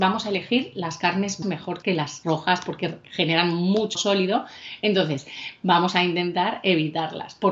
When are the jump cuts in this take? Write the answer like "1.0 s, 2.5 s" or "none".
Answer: 1.4 s, 1.8 s, 2.2 s, 3.9 s